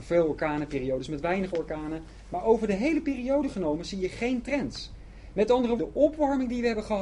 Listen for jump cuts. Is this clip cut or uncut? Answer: cut